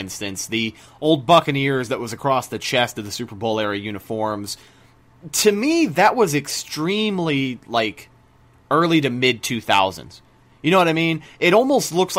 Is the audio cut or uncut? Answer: uncut